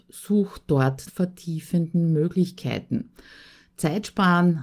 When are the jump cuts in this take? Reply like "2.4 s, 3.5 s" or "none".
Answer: 1.1 s